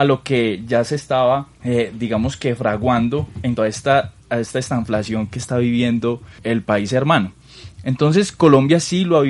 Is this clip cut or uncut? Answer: cut